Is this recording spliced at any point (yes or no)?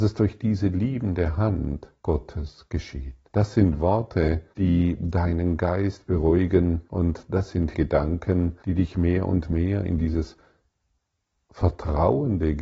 yes